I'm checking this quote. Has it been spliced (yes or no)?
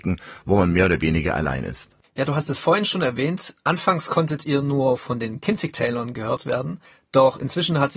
no